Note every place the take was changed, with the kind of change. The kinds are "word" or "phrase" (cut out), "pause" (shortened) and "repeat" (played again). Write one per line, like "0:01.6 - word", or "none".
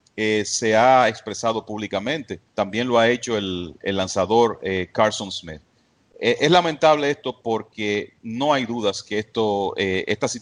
0:02.5 - pause
0:08.2 - pause